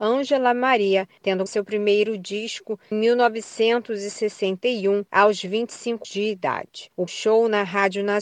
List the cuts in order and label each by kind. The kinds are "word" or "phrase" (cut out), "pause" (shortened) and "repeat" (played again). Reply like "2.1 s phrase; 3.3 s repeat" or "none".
1.5 s word; 2.9 s word; 6.0 s word; 7.1 s word